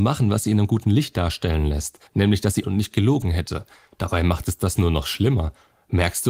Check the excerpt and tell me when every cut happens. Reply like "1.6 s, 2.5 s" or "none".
2.1 s, 2.6 s

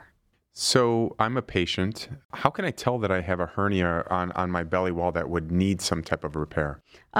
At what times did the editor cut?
none

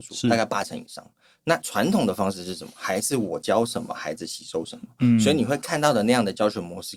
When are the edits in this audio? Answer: none

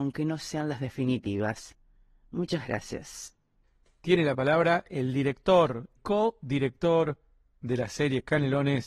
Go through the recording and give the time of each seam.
6.0 s

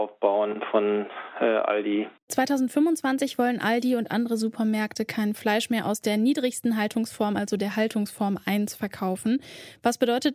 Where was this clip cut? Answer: none

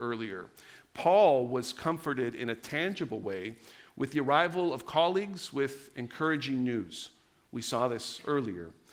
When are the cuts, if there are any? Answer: none

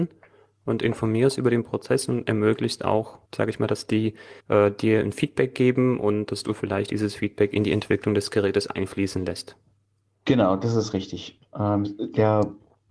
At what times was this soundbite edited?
3.3 s, 4.4 s

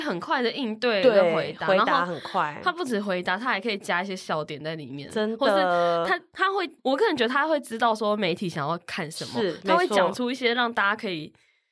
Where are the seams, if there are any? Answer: 6.8 s

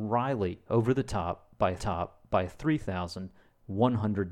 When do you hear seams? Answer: 1.8 s

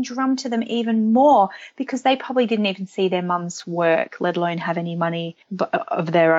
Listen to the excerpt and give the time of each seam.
5.4 s

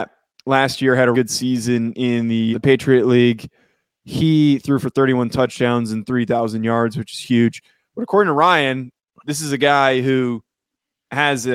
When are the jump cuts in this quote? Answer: 1.1 s, 2.5 s

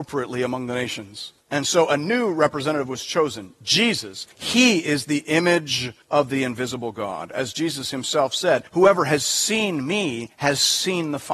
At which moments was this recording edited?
1.4 s, 4.3 s, 6.0 s, 8.7 s, 10.3 s

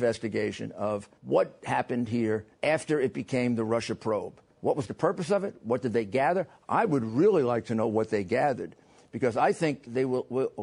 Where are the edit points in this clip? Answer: 1.2 s, 2.5 s, 4.5 s

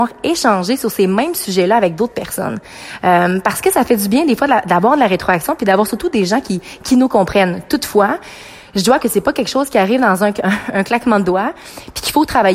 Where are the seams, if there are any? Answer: 9.0 s

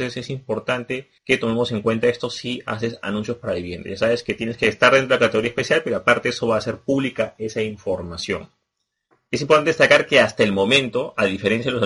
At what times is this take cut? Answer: 1.2 s, 9.1 s

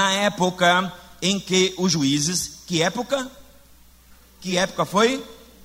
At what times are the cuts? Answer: none

